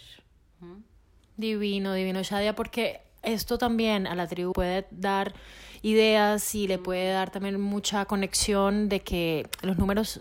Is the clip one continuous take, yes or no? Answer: no